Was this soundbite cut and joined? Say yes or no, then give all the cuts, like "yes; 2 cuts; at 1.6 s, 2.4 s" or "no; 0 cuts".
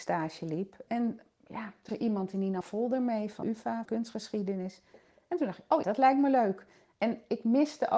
yes; 5 cuts; at 1.9 s, 2.6 s, 3.4 s, 3.8 s, 5.8 s